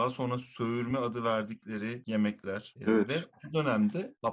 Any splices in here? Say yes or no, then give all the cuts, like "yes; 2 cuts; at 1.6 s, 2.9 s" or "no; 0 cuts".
no; 0 cuts